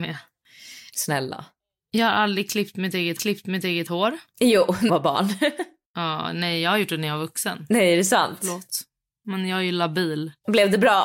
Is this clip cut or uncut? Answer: cut